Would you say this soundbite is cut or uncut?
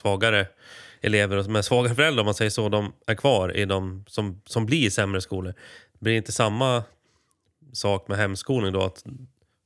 uncut